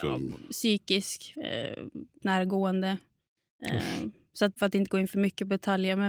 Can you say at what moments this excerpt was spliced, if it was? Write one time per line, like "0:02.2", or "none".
0:01.3
0:02.2
0:04.5